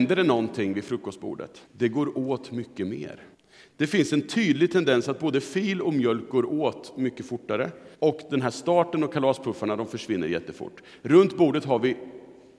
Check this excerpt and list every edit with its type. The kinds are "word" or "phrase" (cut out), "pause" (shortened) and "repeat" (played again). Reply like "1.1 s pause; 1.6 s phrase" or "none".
1.7 s pause; 3.3 s pause; 7.9 s pause